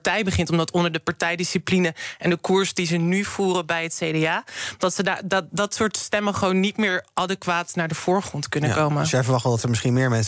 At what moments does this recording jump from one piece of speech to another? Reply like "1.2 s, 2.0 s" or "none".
none